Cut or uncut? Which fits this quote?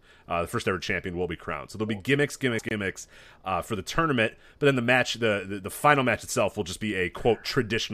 uncut